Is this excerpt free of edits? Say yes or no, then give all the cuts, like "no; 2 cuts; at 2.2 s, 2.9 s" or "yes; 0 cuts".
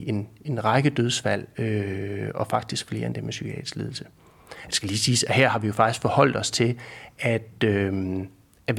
yes; 0 cuts